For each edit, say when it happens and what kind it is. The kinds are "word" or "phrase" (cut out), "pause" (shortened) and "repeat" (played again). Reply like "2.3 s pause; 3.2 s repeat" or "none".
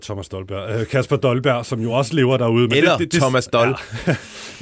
none